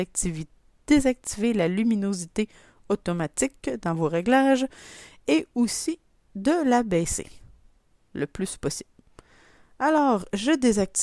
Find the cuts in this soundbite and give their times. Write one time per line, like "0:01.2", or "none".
none